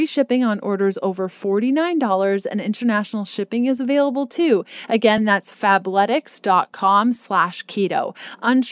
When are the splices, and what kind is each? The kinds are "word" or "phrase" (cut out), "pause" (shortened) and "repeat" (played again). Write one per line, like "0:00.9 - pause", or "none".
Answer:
none